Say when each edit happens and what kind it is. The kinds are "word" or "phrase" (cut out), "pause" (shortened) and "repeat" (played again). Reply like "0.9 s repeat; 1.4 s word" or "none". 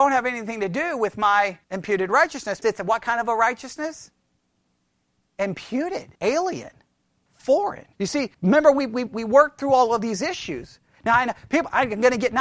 1.6 s pause; 2.6 s word; 6.2 s pause; 7.9 s pause; 8.3 s pause; 9.1 s word